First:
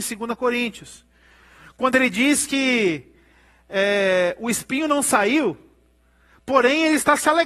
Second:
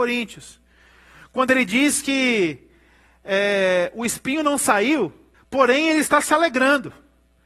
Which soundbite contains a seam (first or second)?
second